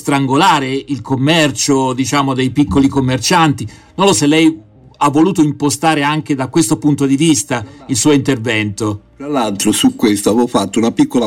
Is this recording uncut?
no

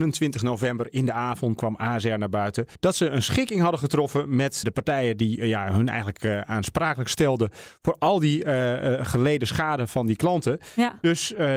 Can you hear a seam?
yes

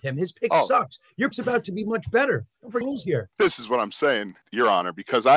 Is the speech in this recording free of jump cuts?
no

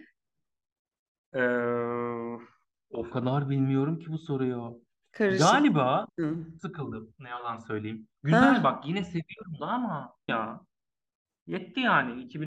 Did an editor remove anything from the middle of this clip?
yes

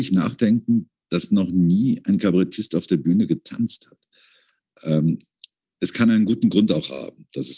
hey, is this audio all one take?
yes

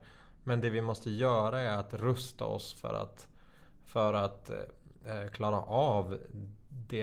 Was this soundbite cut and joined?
no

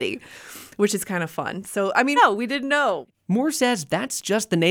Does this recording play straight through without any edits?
no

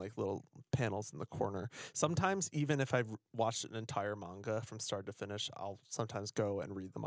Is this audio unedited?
yes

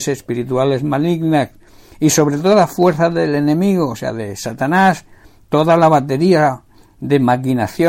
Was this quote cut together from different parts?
no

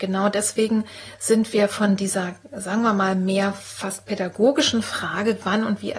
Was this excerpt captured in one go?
yes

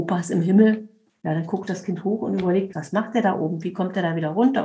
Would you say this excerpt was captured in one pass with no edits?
no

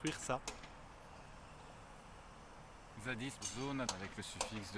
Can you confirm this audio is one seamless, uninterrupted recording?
no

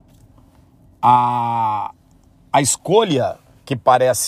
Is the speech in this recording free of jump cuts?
yes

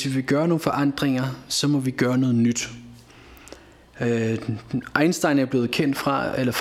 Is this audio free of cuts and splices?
yes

